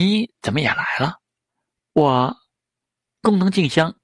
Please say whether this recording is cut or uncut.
uncut